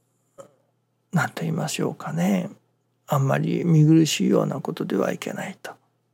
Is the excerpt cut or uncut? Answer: uncut